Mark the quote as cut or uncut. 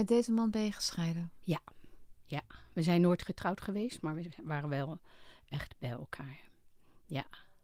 uncut